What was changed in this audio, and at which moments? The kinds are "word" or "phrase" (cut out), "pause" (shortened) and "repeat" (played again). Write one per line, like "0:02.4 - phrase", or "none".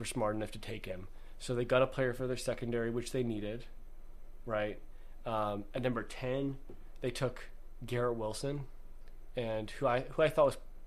none